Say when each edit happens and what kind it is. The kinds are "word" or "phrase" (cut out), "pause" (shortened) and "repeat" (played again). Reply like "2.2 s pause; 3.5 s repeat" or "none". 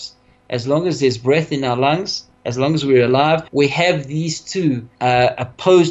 3.5 s pause; 4.9 s pause